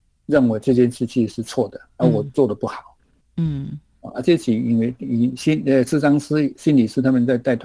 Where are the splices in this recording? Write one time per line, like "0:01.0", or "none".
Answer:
0:03.2